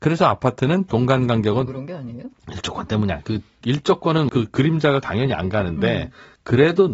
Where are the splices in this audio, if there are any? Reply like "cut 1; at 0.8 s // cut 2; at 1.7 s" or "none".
cut 1; at 1.7 s // cut 2; at 3.6 s // cut 3; at 4.3 s // cut 4; at 5.0 s